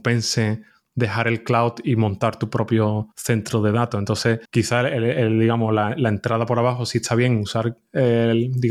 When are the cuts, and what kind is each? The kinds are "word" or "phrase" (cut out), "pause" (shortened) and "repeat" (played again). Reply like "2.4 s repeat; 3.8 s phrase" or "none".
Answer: 3.1 s pause; 4.4 s pause